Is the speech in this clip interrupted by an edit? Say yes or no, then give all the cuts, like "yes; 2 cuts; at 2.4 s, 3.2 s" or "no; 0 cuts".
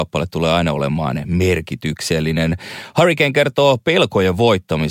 no; 0 cuts